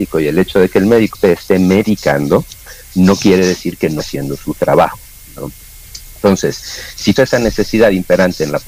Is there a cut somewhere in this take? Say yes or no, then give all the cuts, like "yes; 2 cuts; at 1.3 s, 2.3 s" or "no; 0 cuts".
yes; 3 cuts; at 1.1 s, 4.0 s, 7.2 s